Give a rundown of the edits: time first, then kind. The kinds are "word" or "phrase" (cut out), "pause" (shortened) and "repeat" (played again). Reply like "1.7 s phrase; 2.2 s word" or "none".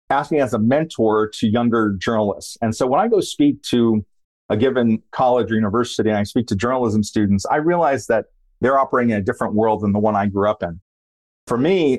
none